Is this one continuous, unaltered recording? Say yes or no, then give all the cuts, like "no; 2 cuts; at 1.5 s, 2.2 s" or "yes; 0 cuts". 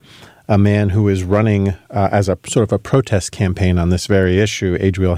yes; 0 cuts